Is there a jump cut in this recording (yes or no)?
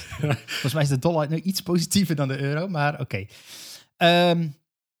no